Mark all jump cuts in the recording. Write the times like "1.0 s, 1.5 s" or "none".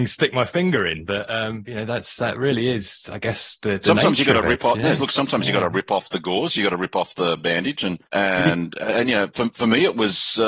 8.0 s